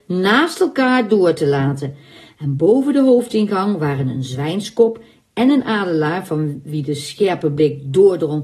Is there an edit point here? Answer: no; 0 cuts

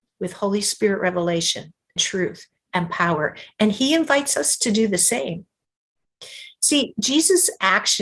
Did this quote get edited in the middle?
yes; 1 cut; at 2.0 s

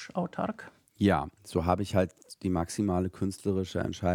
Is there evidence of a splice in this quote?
no; 0 cuts

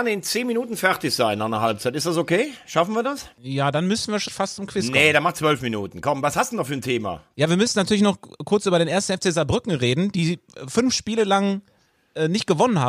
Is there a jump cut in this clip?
yes; 2 cuts; at 3.3 s, 4.3 s

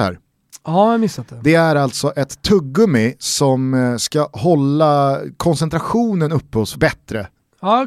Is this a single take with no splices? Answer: no; 1 cut; at 6.7 s

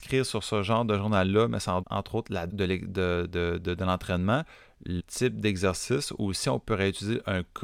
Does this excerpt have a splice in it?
yes; 3 cuts; at 1.8 s, 2.5 s, 5.0 s

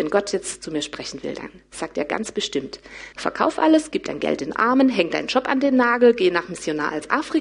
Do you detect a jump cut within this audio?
yes; 1 cut; at 3.1 s

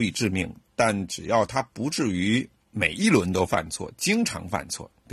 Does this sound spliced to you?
yes; 1 cut; at 2.6 s

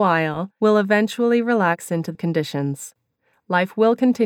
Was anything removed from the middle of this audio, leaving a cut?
yes; 1 cut; at 2.1 s

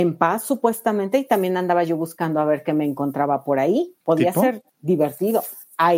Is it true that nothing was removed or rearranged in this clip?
no; 2 cuts; at 4.0 s, 4.7 s

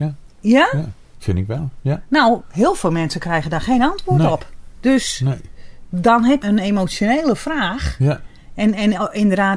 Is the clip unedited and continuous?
no; 1 cut; at 6.4 s

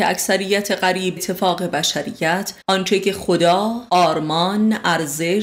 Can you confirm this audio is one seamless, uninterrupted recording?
no; 3 cuts; at 1.2 s, 2.6 s, 3.9 s

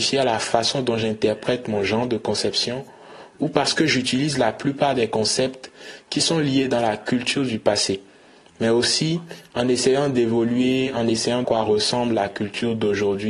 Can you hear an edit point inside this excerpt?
yes; 1 cut; at 11.4 s

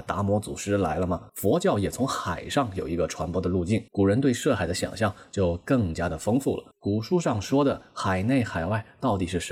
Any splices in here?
yes; 3 cuts; at 1.3 s, 3.9 s, 6.7 s

